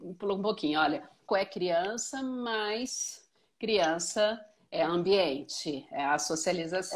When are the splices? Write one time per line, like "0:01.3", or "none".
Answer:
0:01.3